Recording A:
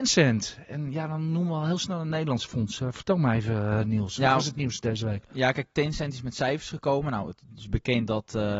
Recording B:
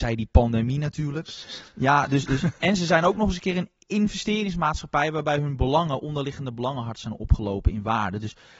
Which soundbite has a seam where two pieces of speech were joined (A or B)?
B